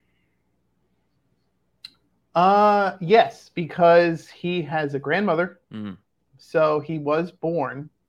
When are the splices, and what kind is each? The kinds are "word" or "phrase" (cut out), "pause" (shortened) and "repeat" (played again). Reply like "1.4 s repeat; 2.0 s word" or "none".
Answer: 5.6 s pause